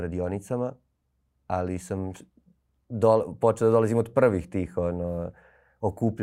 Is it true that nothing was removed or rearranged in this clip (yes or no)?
yes